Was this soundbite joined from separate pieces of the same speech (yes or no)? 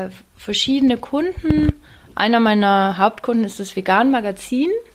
no